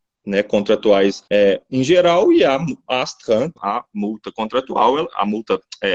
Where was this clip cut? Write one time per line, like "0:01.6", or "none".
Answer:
0:01.3
0:03.6